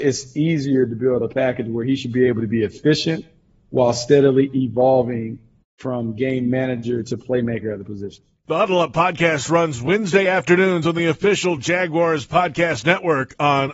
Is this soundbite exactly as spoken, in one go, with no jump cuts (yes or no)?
yes